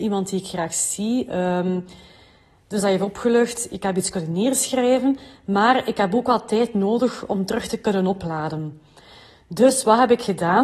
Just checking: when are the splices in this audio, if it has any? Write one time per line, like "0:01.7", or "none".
none